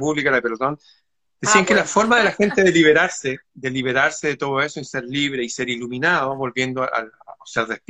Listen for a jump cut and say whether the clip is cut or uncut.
uncut